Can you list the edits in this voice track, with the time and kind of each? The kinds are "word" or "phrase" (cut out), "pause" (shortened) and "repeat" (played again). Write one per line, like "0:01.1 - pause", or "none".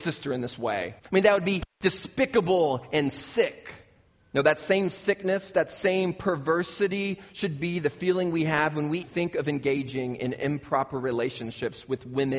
0:01.0 - pause
0:04.1 - pause
0:09.0 - word